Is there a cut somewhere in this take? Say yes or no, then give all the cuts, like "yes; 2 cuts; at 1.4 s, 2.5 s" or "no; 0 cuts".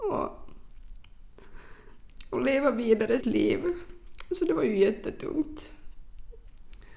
yes; 1 cut; at 3.2 s